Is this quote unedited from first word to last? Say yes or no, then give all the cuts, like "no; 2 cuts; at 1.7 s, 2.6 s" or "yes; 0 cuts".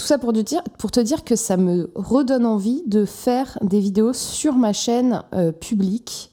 yes; 0 cuts